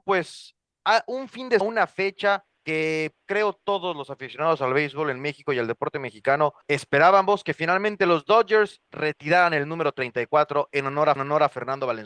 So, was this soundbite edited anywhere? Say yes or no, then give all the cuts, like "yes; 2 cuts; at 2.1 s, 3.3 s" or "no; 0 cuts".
yes; 5 cuts; at 1.6 s, 2.5 s, 6.6 s, 8.8 s, 11.2 s